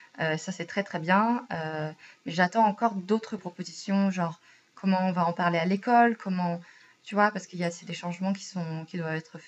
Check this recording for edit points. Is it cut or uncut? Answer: cut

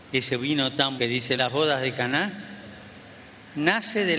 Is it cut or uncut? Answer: cut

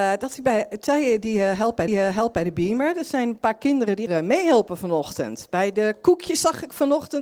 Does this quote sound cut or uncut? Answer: cut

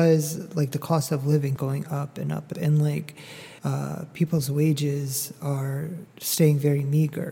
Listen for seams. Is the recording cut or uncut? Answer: cut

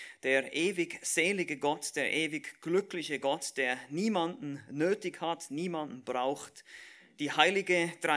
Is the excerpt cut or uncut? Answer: uncut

